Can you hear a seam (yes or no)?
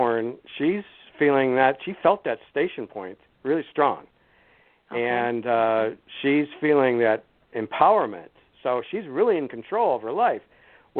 no